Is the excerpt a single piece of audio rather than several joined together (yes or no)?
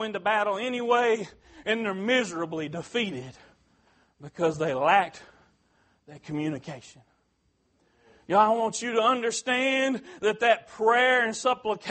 yes